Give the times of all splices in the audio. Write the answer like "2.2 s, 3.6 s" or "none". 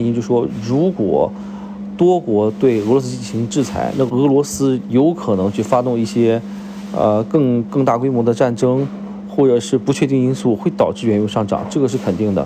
4.1 s